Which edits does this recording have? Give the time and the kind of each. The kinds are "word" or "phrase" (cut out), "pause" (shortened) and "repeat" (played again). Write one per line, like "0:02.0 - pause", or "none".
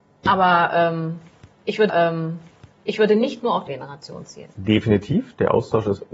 0:01.9 - repeat
0:03.7 - word